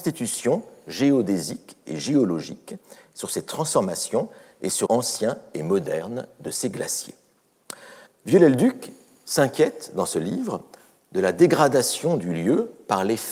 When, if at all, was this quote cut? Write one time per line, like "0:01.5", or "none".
0:04.9
0:08.1